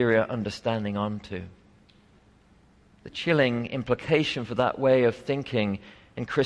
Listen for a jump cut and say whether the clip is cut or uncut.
uncut